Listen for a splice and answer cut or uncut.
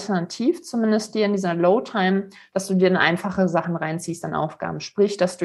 uncut